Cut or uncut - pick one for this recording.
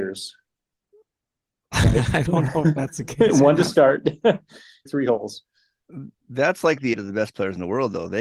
cut